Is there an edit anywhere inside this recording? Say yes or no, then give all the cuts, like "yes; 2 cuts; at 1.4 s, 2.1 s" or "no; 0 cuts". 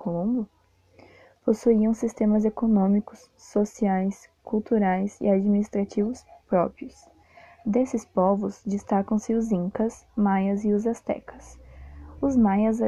no; 0 cuts